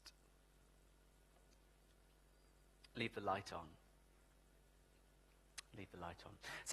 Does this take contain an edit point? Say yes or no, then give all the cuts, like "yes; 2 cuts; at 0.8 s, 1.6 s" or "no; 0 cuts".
no; 0 cuts